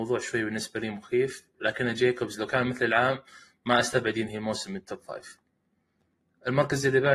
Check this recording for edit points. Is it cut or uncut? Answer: uncut